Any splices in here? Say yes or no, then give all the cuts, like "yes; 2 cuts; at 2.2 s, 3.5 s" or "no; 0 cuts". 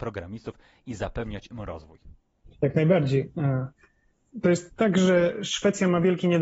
yes; 1 cut; at 2.3 s